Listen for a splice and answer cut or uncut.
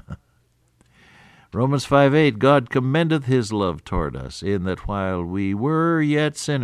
uncut